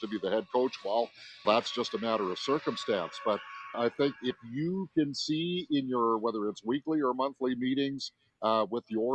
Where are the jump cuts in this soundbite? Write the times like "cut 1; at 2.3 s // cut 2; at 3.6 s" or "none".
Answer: cut 1; at 1.4 s // cut 2; at 3.7 s